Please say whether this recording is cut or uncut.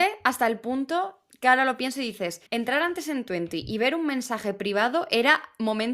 cut